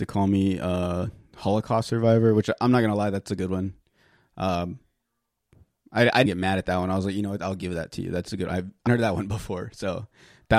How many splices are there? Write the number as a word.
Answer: two